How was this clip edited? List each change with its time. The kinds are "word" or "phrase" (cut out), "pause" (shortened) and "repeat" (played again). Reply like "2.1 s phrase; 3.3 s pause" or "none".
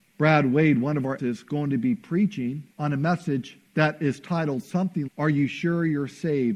1.2 s word; 2.7 s pause; 3.7 s pause; 5.1 s word

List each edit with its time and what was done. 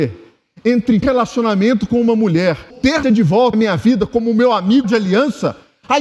1.0 s word; 2.7 s word; 3.0 s word; 3.5 s word; 4.8 s word

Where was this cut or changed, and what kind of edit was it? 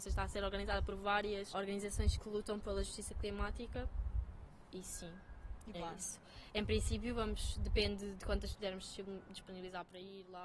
1.5 s word; 2.2 s word; 5.7 s phrase; 8.5 s word

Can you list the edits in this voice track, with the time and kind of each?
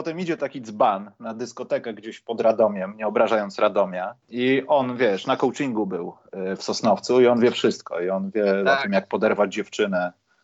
4.2 s pause

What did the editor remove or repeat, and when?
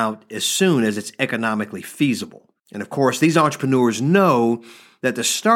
2.6 s pause

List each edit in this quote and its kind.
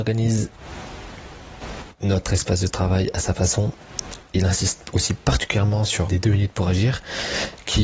6.1 s phrase

